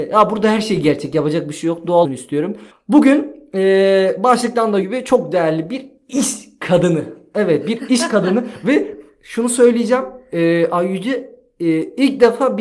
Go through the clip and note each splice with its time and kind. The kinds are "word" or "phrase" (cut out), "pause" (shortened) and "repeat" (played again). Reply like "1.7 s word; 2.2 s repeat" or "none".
2.0 s word; 2.7 s pause; 4.8 s word

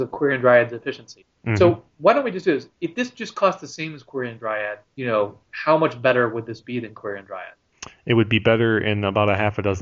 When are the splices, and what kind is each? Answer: none

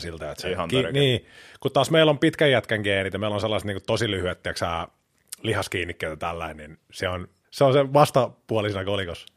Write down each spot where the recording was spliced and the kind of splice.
7.4 s pause

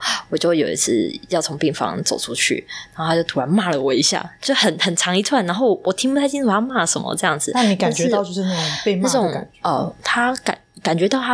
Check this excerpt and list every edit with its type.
none

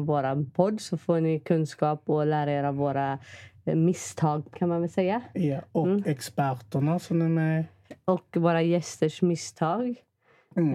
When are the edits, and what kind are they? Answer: 4.5 s word

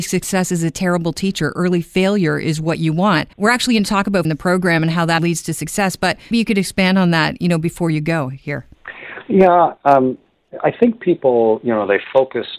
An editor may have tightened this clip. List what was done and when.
3.3 s pause; 4.2 s phrase; 5.2 s word; 6.3 s word; 9.8 s pause

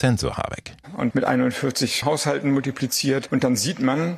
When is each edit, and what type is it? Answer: 1.1 s word; 2.0 s word

